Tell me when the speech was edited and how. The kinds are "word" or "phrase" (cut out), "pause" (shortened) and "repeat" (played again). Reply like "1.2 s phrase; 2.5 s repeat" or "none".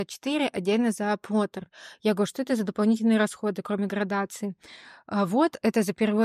none